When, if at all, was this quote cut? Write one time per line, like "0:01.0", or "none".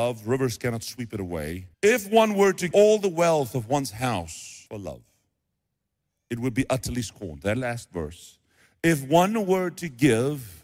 0:01.7
0:02.7
0:04.7